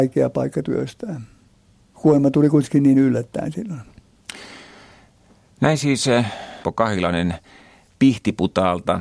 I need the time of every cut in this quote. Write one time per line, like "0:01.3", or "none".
0:06.6